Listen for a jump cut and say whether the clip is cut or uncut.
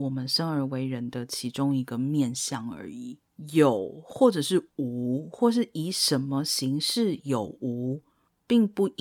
uncut